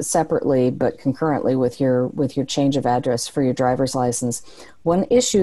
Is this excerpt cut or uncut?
uncut